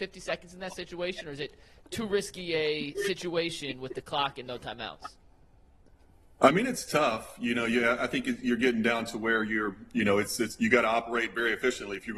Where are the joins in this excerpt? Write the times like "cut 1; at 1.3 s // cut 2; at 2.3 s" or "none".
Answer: none